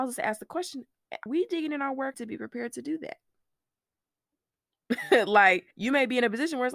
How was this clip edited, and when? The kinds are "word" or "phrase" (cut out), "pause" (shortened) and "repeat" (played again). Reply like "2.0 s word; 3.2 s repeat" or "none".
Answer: 1.3 s word; 2.1 s word; 5.7 s pause